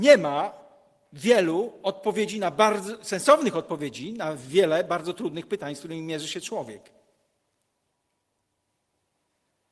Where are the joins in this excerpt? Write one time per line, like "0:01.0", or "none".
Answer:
none